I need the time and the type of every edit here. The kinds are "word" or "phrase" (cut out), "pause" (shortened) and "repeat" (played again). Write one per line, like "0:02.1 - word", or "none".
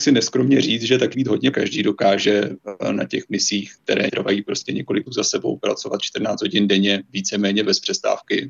0:01.1 - word
0:01.5 - phrase
0:04.1 - word
0:05.1 - word

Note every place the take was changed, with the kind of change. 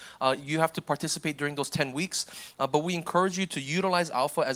none

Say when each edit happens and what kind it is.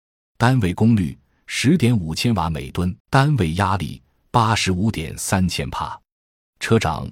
0:03.0 - pause

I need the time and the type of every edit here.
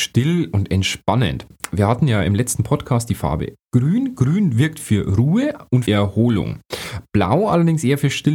0:05.9 - word

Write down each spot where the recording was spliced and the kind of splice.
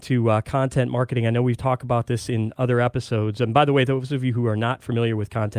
none

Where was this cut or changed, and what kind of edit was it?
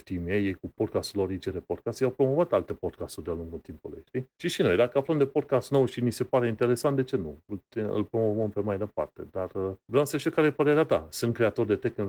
0:04.3 - pause
0:09.8 - pause

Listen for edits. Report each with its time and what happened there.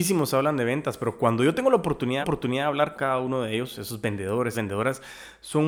0:02.2 - repeat
0:02.9 - word
0:04.5 - word

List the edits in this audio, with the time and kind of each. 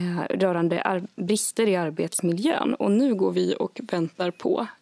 none

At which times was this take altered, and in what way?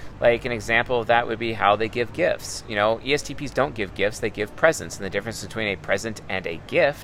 none

